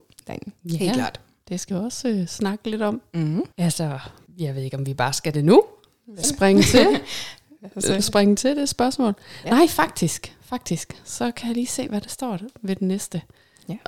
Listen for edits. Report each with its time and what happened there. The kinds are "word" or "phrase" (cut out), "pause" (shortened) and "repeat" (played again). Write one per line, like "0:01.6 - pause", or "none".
0:01.7 - word
0:05.3 - word
0:06.2 - word